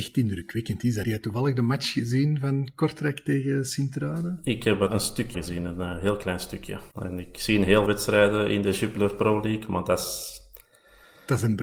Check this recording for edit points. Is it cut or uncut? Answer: cut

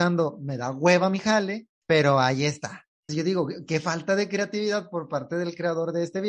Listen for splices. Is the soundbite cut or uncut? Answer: cut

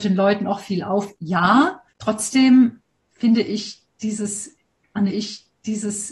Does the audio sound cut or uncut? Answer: cut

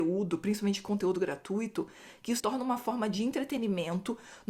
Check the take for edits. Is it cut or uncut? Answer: cut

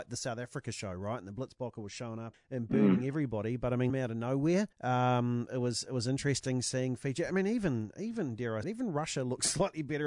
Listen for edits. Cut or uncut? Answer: cut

